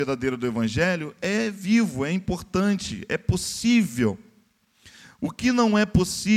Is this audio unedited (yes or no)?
yes